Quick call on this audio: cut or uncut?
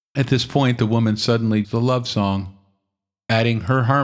cut